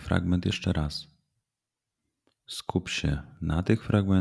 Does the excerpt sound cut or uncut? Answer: uncut